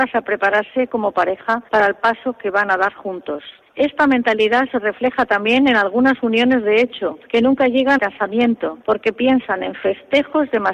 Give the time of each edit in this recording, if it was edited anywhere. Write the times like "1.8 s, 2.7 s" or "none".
1.7 s, 3.6 s, 7.2 s, 8.0 s, 8.8 s